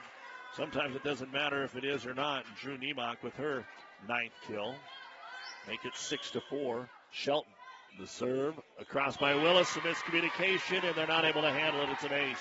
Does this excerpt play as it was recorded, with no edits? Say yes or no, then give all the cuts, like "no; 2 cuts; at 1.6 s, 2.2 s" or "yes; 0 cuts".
no; 1 cut; at 7.9 s